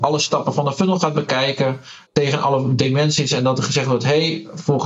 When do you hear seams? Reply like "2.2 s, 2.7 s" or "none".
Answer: 2.1 s